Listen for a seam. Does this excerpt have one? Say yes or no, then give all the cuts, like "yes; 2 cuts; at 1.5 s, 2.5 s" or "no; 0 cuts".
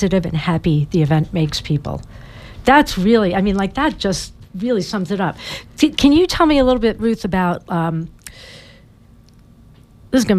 no; 0 cuts